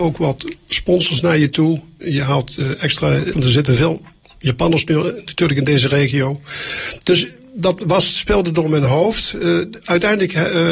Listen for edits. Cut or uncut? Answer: cut